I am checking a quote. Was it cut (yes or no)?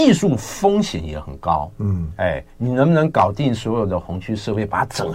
no